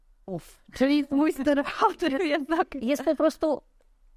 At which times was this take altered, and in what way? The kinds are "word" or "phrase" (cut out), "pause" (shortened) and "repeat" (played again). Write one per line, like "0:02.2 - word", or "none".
none